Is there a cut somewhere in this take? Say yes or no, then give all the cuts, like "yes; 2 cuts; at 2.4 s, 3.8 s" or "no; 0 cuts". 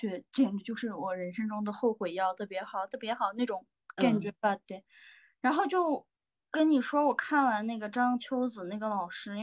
no; 0 cuts